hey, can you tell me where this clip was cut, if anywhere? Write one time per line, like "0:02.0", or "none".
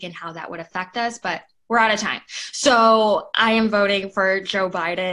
none